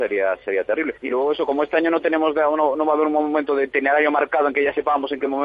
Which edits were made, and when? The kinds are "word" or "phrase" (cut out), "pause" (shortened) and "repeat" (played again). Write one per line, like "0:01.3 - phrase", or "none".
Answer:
0:01.0 - pause

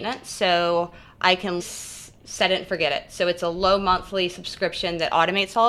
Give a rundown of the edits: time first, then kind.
0:01.6 - word

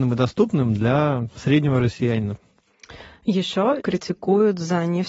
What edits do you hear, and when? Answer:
0:01.3 - word
0:03.8 - word

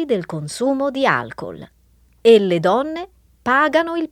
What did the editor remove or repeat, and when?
none

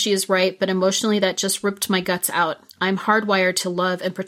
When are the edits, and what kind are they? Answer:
none

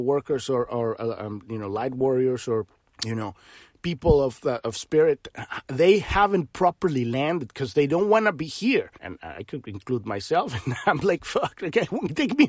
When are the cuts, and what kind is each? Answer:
0:02.8 - pause
0:09.0 - pause

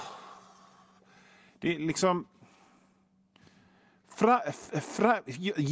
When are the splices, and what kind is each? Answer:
none

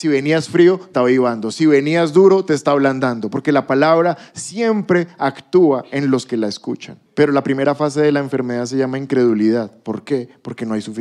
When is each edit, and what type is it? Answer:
0:00.9 - word
0:07.1 - pause

